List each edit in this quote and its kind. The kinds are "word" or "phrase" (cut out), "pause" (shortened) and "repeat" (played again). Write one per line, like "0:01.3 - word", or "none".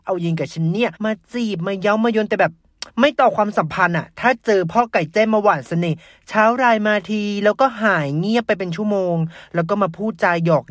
0:01.0 - pause
0:02.9 - pause